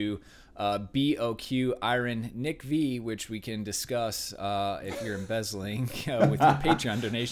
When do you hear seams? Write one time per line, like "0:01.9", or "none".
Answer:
none